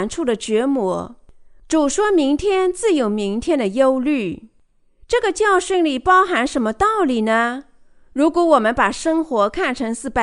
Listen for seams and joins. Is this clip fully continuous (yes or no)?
yes